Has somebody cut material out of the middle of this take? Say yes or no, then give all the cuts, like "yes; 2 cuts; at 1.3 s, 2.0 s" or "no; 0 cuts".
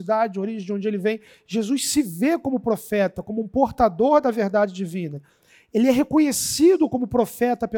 no; 0 cuts